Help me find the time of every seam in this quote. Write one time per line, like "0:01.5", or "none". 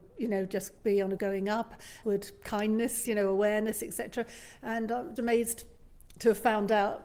0:01.2
0:02.0
0:03.0
0:05.2